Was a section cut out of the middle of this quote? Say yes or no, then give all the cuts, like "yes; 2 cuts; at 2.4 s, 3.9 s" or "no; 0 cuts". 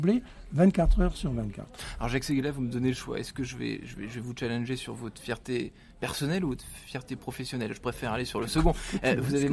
no; 0 cuts